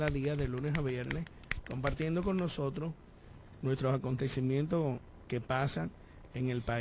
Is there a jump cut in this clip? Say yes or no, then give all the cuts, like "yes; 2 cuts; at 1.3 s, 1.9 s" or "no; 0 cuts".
no; 0 cuts